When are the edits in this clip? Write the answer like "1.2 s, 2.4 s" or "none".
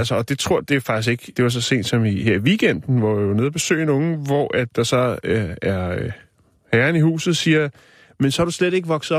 none